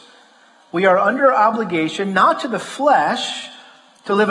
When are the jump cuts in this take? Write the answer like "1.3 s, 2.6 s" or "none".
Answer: none